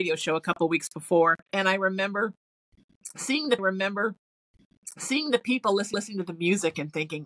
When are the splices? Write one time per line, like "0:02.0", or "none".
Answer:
0:01.4
0:03.6
0:05.9